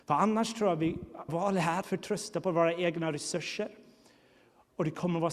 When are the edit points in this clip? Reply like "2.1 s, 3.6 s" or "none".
1.3 s, 1.8 s